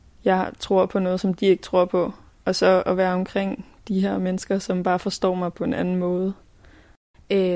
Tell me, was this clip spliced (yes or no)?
no